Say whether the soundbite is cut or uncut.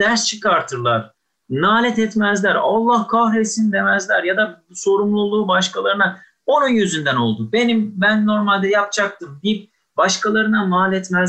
uncut